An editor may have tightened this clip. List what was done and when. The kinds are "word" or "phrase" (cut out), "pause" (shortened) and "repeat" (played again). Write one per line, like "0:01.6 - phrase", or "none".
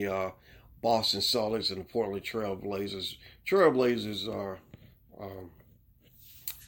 none